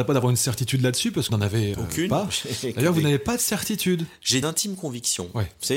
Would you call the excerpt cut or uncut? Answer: cut